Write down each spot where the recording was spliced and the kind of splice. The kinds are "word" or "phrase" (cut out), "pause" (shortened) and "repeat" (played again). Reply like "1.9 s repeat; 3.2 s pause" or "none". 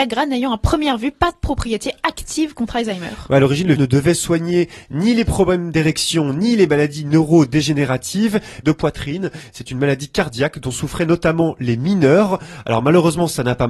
3.8 s word; 8.6 s phrase